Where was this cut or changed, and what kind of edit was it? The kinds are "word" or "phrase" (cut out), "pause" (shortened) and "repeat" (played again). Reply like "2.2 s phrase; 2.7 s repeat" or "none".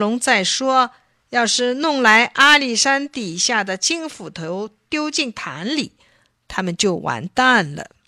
none